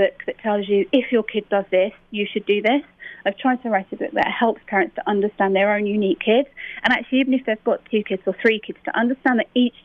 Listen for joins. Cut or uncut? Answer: uncut